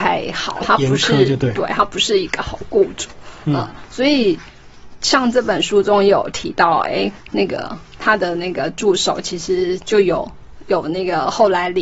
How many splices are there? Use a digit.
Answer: 0